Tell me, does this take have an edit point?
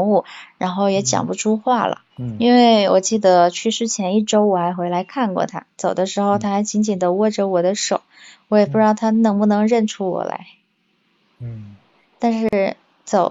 yes; 2 cuts; at 2.1 s, 12.0 s

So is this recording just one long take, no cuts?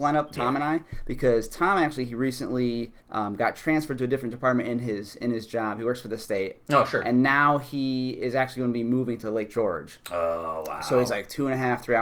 no; 1 cut; at 3.0 s

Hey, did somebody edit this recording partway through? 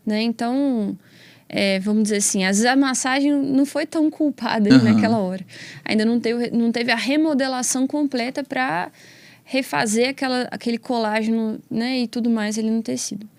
no; 0 cuts

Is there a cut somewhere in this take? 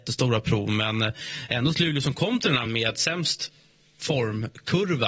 yes; 1 cut; at 2.7 s

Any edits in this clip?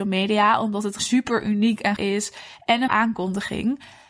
yes; 3 cuts; at 1.0 s, 2.0 s, 2.9 s

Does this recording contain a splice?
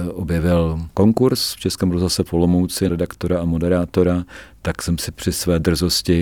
yes; 2 cuts; at 0.9 s, 2.9 s

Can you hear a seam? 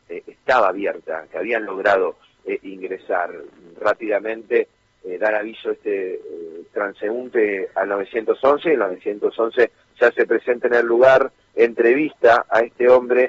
no; 0 cuts

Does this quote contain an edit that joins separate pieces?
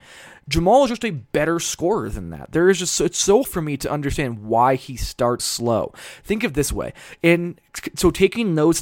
yes; 2 cuts; at 3.4 s, 5.4 s

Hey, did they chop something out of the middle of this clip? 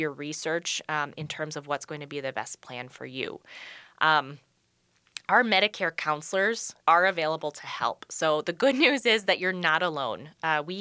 yes; 1 cut; at 6.8 s

